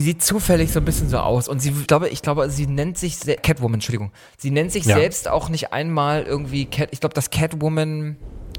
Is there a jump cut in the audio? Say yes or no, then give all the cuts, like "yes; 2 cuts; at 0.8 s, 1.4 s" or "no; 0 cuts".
yes; 2 cuts; at 1.9 s, 3.4 s